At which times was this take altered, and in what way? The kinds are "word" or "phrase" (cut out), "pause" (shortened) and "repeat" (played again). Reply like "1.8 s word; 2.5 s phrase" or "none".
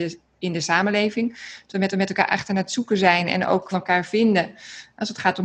1.9 s repeat; 3.7 s phrase